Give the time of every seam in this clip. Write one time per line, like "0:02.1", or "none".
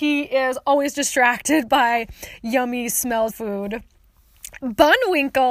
0:03.3